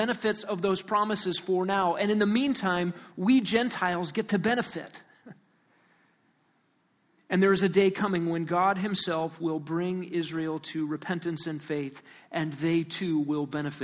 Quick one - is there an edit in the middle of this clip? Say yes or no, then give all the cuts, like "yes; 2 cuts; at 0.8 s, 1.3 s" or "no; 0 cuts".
no; 0 cuts